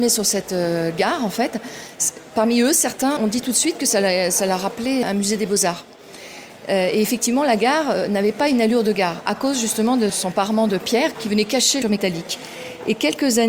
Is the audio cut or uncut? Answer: cut